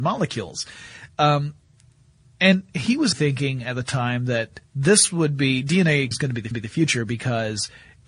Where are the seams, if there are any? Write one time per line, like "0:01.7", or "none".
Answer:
0:03.1
0:04.6
0:06.1
0:06.5